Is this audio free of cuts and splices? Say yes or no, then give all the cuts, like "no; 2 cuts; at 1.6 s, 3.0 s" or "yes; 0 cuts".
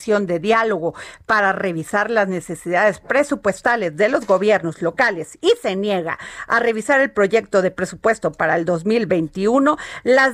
yes; 0 cuts